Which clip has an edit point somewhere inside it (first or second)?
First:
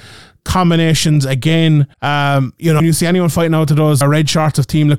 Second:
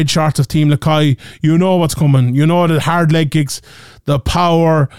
first